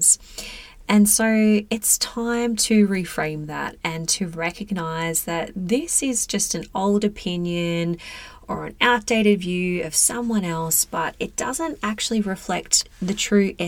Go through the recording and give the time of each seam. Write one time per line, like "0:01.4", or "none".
none